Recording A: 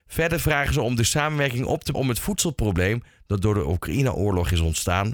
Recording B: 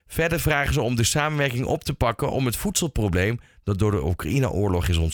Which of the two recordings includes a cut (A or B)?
A